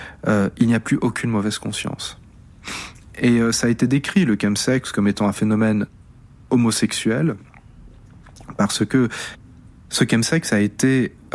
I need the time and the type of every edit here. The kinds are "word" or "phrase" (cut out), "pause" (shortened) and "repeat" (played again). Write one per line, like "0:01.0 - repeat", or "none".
none